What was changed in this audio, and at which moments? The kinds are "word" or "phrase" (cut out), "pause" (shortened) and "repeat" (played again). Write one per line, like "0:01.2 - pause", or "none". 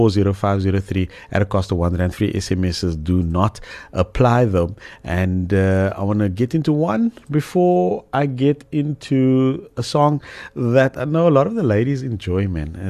none